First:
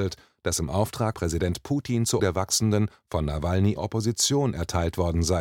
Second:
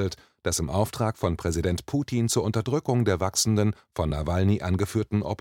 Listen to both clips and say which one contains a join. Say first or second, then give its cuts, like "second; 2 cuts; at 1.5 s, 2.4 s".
first; 3 cuts; at 1.1 s, 2.2 s, 3.8 s